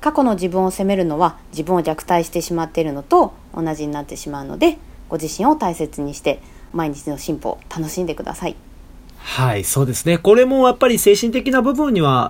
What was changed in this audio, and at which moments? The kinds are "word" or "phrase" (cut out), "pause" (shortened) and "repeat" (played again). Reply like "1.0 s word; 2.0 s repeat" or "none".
9.1 s pause